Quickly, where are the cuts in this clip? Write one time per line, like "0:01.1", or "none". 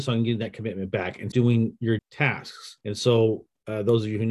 0:01.3
0:02.0
0:02.8